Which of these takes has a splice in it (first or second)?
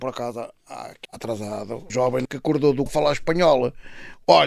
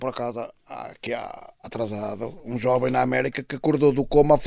first